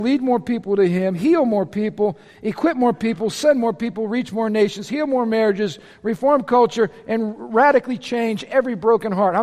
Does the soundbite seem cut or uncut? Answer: uncut